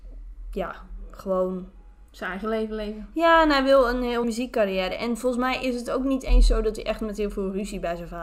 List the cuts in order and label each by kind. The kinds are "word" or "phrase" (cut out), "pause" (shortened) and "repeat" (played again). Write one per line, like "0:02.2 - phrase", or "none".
0:02.1 - pause
0:04.2 - word